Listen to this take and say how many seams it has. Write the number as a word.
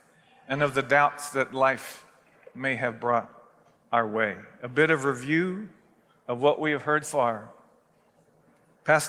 one